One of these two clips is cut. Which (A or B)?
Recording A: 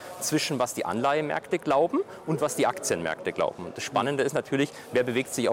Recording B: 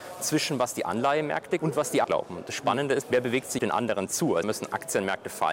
B